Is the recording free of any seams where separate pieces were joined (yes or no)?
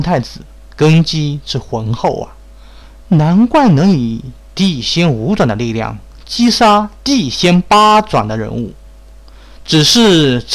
yes